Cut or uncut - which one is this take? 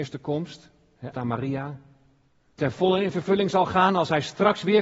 cut